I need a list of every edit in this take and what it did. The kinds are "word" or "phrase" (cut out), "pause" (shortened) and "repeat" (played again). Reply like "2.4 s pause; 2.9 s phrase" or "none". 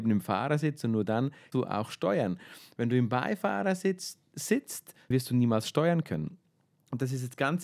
1.5 s word; 5.1 s word

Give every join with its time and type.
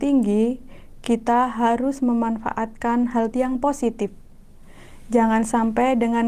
3.3 s phrase

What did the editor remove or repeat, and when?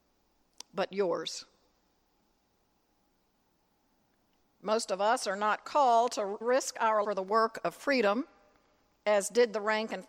6.4 s word; 7.0 s word

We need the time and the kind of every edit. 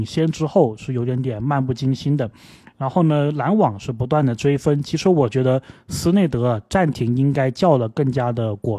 none

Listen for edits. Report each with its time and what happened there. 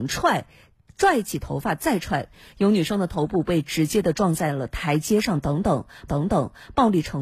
6.1 s repeat

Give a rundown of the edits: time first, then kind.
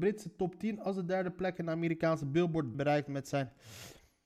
2.7 s phrase

